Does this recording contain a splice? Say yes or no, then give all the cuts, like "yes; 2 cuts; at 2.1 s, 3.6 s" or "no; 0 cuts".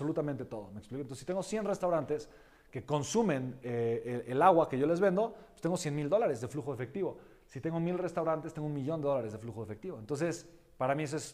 no; 0 cuts